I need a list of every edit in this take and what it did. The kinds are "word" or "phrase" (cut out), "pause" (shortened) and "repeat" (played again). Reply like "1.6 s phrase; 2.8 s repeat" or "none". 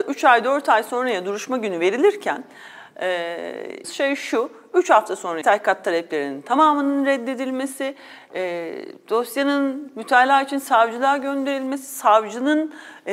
3.8 s phrase; 5.4 s phrase